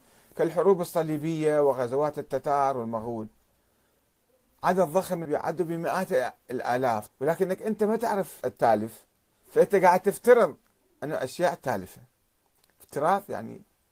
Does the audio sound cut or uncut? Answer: cut